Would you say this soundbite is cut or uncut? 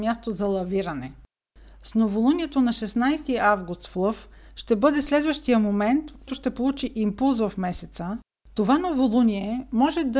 cut